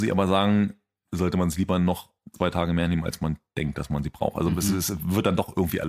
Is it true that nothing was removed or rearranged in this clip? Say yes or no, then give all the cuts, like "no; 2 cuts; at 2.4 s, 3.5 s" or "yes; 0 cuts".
yes; 0 cuts